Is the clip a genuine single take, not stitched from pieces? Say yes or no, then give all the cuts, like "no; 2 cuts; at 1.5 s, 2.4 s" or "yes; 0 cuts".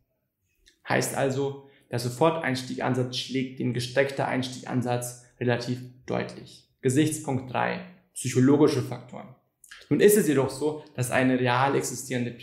yes; 0 cuts